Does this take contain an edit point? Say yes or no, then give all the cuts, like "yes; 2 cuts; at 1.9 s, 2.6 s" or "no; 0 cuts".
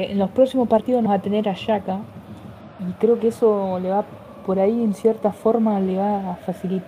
yes; 1 cut; at 1.1 s